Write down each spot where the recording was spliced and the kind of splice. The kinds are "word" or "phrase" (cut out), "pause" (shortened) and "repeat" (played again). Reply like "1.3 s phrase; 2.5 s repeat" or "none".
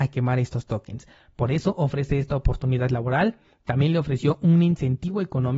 none